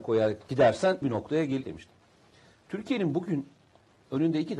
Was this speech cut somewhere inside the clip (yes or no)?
yes